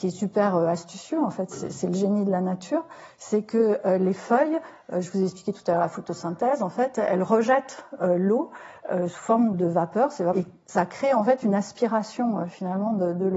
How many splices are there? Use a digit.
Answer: 2